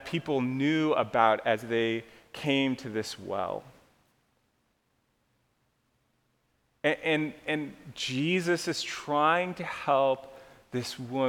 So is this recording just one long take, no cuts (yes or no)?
yes